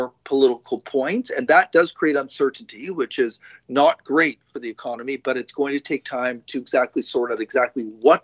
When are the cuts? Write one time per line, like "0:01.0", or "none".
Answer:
none